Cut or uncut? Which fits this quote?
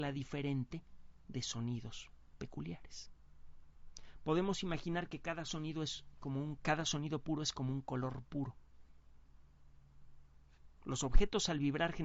cut